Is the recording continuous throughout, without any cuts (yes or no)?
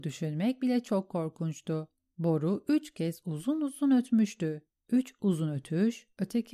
yes